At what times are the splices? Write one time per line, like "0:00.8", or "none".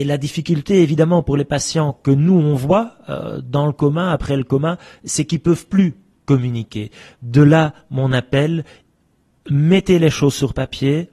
none